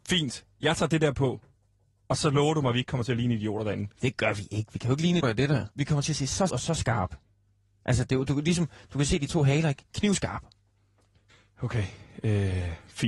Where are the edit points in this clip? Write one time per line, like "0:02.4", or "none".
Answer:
0:05.2
0:05.7
0:06.5

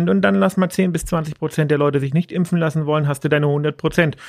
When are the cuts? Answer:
none

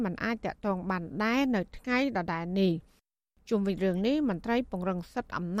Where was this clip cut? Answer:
none

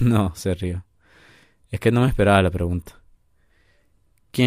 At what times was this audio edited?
none

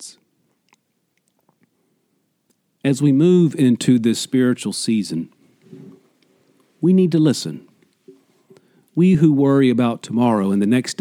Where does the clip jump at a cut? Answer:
none

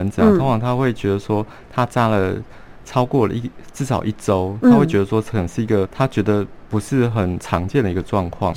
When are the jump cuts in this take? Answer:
0:05.9

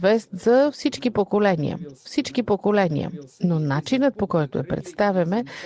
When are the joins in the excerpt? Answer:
0:02.0

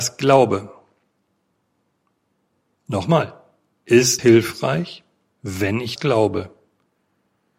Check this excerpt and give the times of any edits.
0:04.2
0:06.0

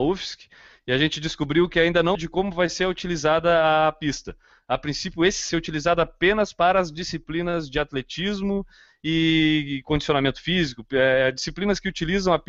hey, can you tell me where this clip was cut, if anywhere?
0:02.1
0:05.5

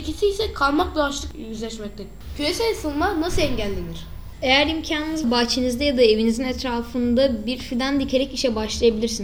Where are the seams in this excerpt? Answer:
0:05.2

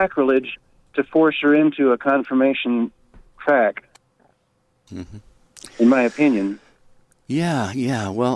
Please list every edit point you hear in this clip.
none

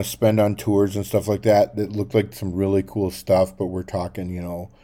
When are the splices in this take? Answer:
none

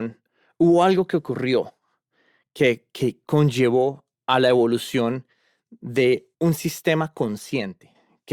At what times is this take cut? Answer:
0:04.1
0:06.3

